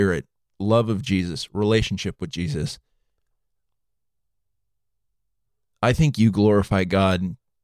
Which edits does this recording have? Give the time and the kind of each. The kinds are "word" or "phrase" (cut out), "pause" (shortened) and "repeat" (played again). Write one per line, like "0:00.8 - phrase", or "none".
none